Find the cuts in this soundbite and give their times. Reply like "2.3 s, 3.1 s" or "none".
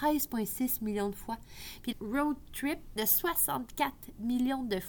1.9 s, 3.0 s